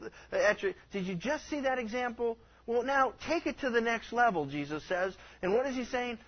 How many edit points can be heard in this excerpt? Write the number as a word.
zero